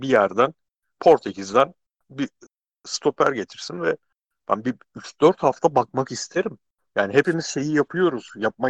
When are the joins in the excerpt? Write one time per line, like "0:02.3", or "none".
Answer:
none